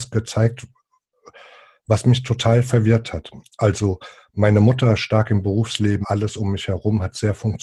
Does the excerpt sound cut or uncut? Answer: cut